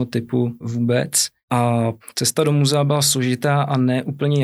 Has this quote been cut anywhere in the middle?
no; 0 cuts

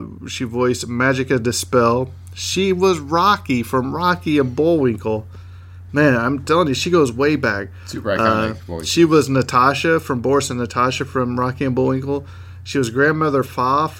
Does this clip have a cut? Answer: no; 0 cuts

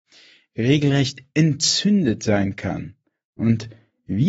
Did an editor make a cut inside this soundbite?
no; 0 cuts

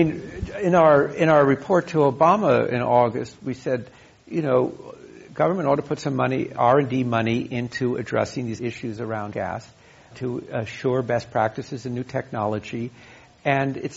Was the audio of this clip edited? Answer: yes; 3 cuts; at 8.6 s, 9.3 s, 10.1 s

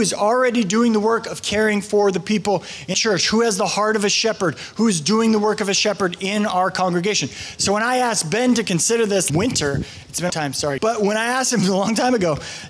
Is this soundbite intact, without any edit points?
no; 4 cuts; at 2.9 s, 9.3 s, 10.3 s, 10.8 s

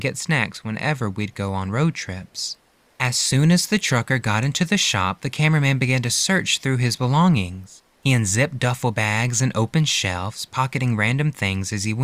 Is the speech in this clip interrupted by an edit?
no; 0 cuts

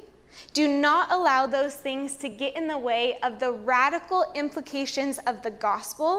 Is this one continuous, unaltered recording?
yes; 0 cuts

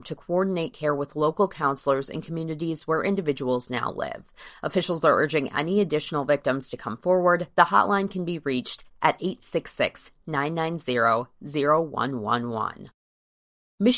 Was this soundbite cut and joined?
no; 0 cuts

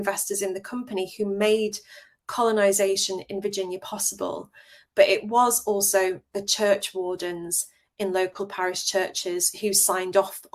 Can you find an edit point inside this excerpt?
no; 0 cuts

